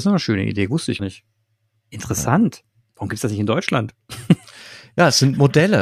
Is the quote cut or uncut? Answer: cut